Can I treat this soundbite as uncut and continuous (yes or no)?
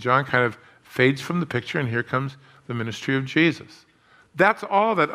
yes